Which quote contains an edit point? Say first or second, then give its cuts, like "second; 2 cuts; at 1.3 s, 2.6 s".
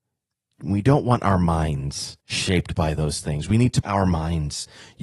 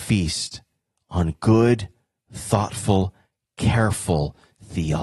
first; 2 cuts; at 2.2 s, 3.8 s